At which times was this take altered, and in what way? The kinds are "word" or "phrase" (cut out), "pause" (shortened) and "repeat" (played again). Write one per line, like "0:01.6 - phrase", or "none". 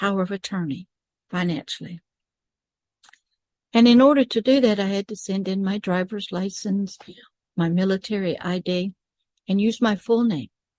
none